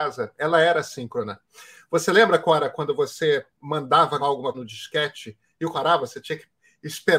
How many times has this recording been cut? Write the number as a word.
three